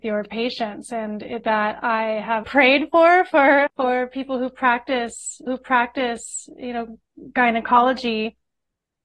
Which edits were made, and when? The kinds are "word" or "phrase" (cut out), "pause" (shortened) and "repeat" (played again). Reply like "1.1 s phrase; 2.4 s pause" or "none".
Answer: 1.4 s word; 2.4 s word; 3.7 s word; 5.5 s repeat